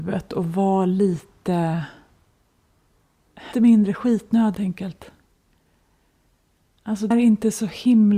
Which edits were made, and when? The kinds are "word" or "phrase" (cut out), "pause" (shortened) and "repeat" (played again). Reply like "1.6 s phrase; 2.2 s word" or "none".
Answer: 3.5 s word; 4.5 s word; 7.1 s word